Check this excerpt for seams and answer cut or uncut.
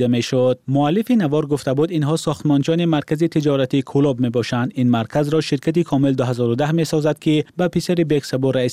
cut